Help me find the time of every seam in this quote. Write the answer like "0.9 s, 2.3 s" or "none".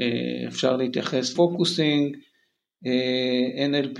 1.3 s